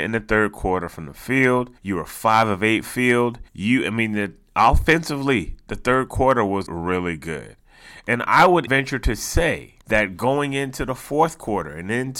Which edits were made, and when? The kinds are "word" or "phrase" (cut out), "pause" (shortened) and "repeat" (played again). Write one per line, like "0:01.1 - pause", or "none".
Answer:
0:01.8 - pause
0:02.8 - phrase
0:03.5 - pause
0:06.7 - word
0:08.7 - word
0:09.8 - pause